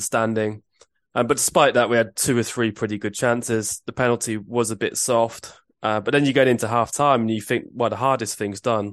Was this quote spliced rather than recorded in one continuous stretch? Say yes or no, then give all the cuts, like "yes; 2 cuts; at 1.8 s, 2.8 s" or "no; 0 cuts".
no; 0 cuts